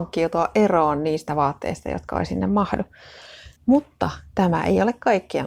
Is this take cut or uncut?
cut